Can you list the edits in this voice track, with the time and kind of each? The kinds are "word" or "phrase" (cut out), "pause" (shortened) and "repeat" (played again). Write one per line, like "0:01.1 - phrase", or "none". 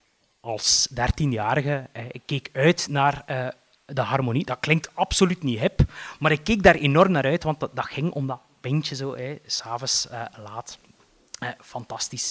none